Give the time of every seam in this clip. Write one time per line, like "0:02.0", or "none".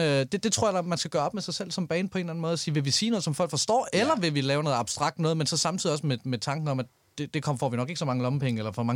none